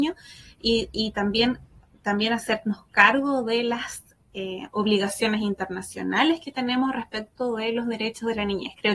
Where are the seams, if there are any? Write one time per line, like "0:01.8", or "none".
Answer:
none